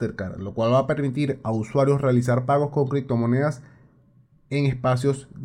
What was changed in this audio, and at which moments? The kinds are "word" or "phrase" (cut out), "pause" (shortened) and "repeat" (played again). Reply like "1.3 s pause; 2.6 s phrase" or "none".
none